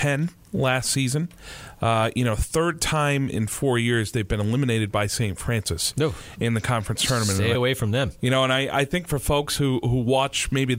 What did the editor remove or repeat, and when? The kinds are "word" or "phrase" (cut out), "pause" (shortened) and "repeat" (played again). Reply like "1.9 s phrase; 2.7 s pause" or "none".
7.5 s phrase